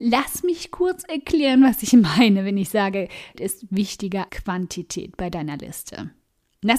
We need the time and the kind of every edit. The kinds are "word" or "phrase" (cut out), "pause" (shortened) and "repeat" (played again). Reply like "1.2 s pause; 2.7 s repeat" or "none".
3.3 s word; 4.3 s word